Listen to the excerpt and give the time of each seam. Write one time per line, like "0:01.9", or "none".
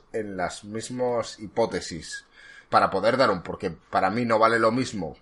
0:02.7
0:03.4